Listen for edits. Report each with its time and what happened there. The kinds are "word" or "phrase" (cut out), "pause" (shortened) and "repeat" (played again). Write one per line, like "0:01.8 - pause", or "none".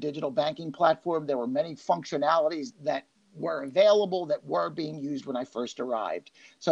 0:02.7 - word